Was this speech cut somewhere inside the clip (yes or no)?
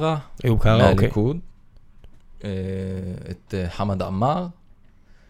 no